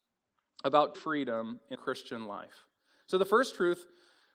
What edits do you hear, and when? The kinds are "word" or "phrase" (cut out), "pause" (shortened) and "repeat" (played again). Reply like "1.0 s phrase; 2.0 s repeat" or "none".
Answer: 0.9 s word; 1.7 s word